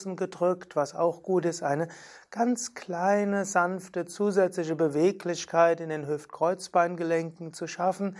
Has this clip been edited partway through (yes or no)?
no